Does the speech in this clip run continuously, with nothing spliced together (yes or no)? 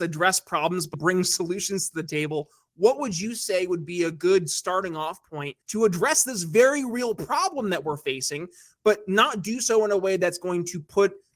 no